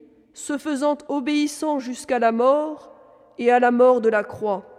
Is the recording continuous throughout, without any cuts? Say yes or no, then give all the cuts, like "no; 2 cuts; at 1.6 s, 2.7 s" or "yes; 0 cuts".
yes; 0 cuts